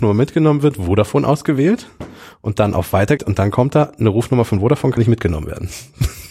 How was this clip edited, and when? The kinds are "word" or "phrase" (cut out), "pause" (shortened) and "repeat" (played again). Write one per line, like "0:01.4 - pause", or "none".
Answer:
0:03.2 - word
0:05.0 - word